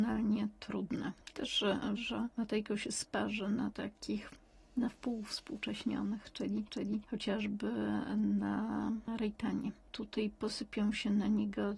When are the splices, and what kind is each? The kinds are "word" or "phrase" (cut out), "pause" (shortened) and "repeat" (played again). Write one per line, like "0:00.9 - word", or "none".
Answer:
0:02.0 - phrase
0:03.7 - phrase
0:06.7 - repeat